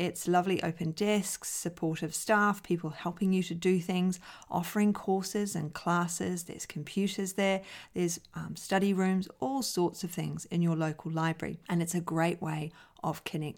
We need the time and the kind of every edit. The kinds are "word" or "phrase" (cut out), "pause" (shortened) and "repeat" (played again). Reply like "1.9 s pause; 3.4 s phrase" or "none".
11.6 s pause